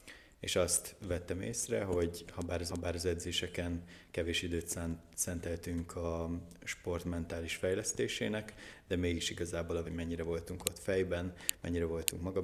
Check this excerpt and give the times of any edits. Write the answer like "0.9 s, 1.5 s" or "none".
2.7 s, 9.8 s